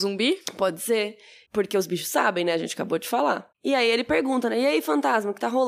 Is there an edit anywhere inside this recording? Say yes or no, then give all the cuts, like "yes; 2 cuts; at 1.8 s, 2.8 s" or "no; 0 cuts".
no; 0 cuts